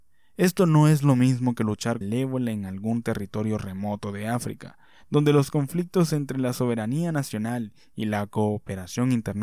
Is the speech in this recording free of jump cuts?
no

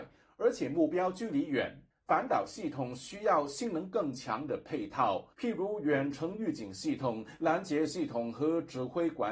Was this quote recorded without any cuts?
no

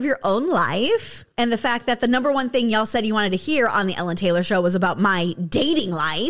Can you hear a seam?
yes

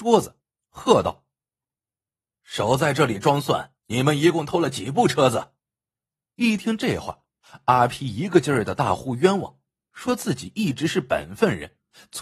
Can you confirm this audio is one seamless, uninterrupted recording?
no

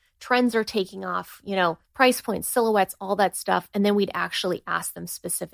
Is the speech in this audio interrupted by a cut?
yes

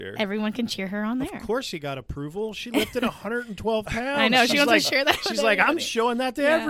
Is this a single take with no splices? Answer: yes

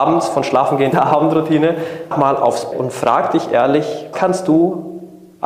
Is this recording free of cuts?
no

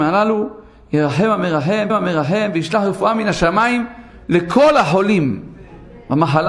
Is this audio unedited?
no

